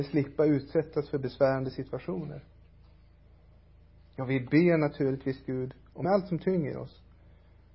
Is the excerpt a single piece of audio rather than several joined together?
no; 1 cut; at 6.0 s

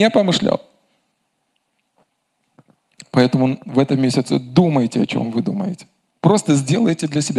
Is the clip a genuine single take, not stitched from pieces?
no; 1 cut; at 6.1 s

